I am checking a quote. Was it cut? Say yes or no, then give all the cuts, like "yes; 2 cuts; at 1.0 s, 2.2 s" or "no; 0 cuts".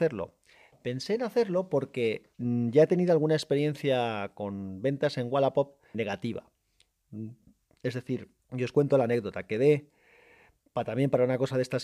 yes; 3 cuts; at 2.3 s, 5.9 s, 8.4 s